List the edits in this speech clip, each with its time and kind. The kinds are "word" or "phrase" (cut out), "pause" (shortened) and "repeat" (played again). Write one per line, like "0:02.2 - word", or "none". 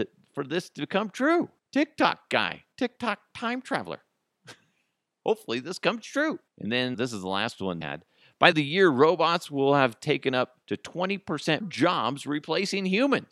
0:01.6 - pause
0:02.7 - pause
0:06.5 - pause
0:06.9 - word
0:07.8 - word
0:08.5 - phrase
0:10.6 - pause
0:11.6 - word